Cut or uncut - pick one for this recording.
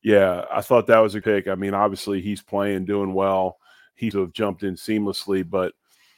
cut